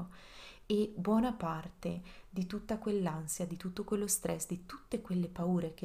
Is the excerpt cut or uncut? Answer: uncut